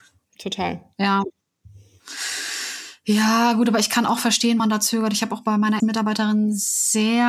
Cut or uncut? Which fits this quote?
cut